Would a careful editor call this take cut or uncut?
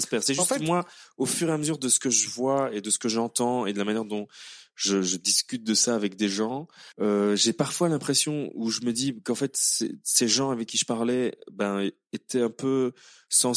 cut